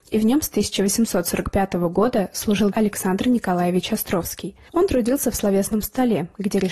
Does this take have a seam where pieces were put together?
yes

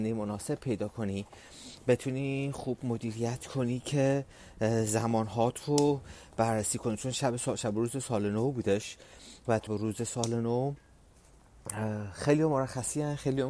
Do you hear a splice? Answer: yes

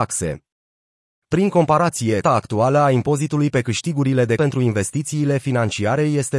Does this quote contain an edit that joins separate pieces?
yes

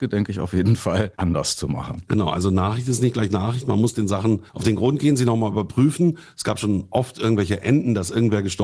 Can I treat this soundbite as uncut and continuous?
no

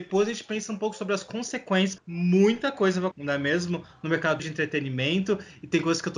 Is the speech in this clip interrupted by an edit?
yes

